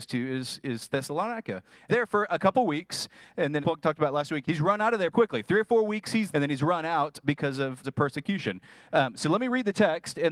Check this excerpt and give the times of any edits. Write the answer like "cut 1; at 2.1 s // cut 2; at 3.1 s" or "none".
cut 1; at 1.9 s // cut 2; at 3.6 s // cut 3; at 4.4 s // cut 4; at 5.1 s // cut 5; at 6.3 s // cut 6; at 7.2 s // cut 7; at 7.8 s